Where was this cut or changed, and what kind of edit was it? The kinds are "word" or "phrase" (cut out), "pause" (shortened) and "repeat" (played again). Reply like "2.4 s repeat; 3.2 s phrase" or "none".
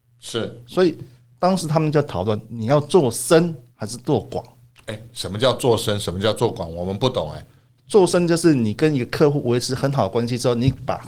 none